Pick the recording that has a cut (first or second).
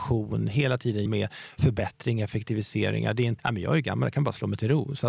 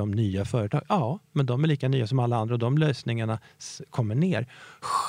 first